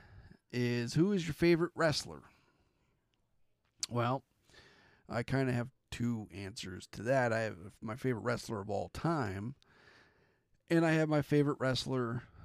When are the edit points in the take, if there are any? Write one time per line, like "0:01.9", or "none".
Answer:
none

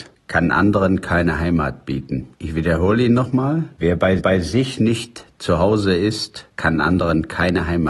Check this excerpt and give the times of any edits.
0:02.3
0:04.2

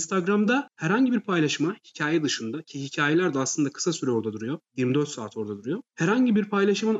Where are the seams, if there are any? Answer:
0:04.6
0:05.9

